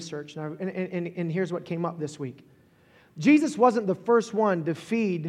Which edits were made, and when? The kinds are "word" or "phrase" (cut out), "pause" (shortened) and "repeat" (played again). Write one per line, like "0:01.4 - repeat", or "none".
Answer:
none